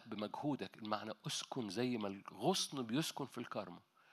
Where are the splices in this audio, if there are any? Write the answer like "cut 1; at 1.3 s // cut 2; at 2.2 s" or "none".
none